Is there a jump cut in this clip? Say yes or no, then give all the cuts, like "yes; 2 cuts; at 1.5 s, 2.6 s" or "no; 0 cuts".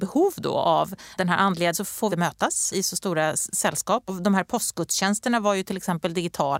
yes; 5 cuts; at 1.2 s, 1.7 s, 2.1 s, 2.7 s, 4.1 s